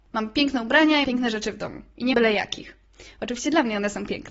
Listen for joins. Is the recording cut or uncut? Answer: cut